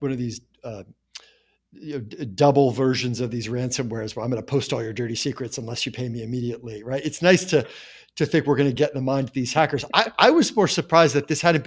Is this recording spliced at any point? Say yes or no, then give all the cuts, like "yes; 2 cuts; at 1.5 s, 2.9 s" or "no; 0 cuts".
no; 0 cuts